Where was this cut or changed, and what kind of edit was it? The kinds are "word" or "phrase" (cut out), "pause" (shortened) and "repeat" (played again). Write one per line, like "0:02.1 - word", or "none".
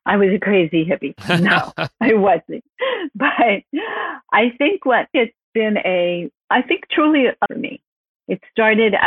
0:05.1 - word
0:07.5 - phrase